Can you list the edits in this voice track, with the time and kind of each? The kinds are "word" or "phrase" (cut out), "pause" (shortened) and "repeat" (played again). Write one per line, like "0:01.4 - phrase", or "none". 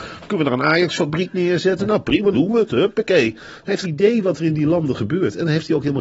0:02.3 - word
0:03.8 - word